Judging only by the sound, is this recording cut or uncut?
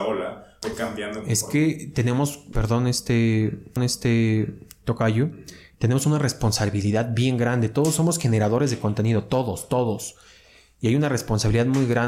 cut